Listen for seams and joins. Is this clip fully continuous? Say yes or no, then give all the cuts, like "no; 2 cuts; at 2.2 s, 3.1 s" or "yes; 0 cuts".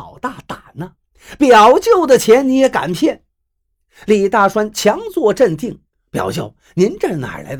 yes; 0 cuts